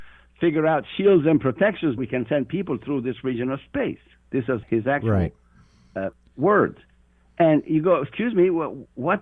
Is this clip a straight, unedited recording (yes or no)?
no